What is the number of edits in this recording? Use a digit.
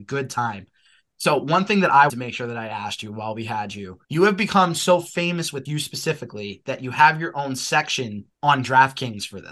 4